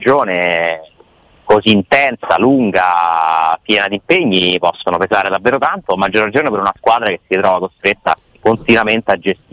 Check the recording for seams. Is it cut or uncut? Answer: uncut